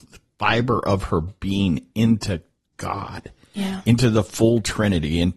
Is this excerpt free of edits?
yes; 0 cuts

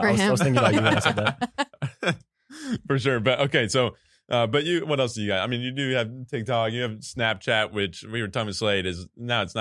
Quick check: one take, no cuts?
yes; 0 cuts

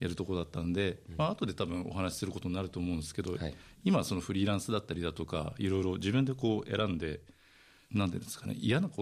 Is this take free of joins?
yes; 0 cuts

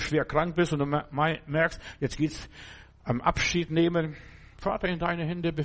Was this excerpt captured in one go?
yes; 0 cuts

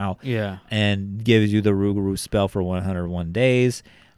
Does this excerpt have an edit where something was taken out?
no; 0 cuts

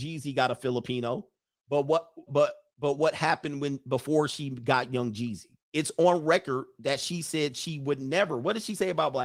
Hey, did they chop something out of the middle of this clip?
yes; 2 cuts; at 2.3 s, 5.6 s

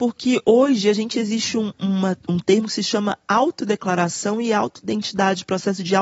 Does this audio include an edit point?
no; 0 cuts

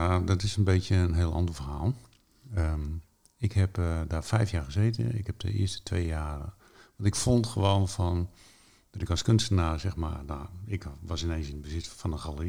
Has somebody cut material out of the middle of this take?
no; 0 cuts

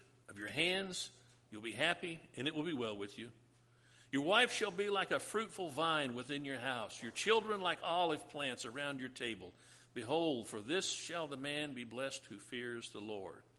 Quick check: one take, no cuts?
yes; 0 cuts

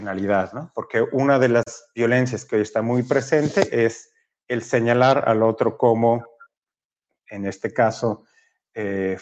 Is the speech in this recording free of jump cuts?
yes; 0 cuts

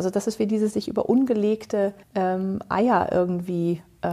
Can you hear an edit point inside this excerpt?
yes; 1 cut; at 2.0 s

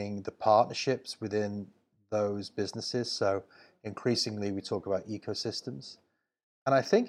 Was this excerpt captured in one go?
yes; 0 cuts

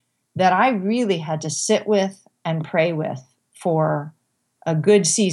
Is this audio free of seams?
yes; 0 cuts

